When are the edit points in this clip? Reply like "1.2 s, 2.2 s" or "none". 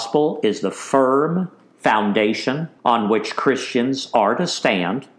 2.8 s